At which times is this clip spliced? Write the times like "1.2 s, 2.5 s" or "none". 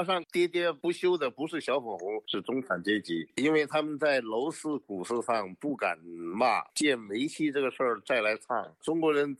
6.7 s